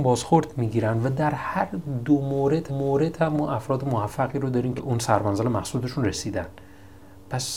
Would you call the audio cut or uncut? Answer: cut